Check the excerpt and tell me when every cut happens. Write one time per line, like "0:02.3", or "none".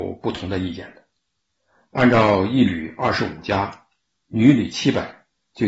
none